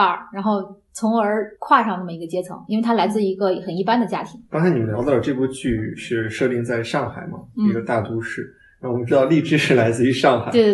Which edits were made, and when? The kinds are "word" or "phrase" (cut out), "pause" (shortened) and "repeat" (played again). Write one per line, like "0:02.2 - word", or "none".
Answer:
none